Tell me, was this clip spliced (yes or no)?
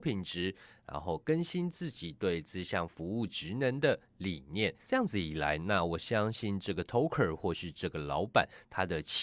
no